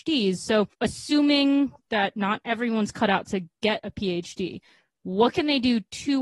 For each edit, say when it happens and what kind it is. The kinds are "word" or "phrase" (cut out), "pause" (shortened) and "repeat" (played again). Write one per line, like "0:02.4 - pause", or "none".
none